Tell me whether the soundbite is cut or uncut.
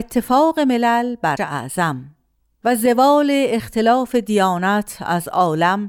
cut